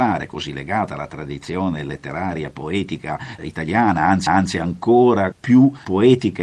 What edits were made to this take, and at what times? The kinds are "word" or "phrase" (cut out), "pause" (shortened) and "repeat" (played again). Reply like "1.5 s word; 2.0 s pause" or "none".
3.4 s word; 4.3 s repeat